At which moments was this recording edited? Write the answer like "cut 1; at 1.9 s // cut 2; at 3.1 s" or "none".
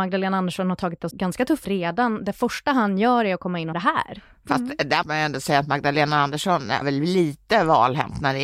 cut 1; at 1.1 s // cut 2; at 1.6 s // cut 3; at 3.7 s // cut 4; at 5.0 s // cut 5; at 6.8 s